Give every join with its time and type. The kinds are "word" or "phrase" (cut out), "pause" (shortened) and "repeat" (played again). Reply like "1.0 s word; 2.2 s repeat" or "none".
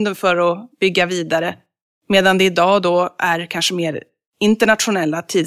none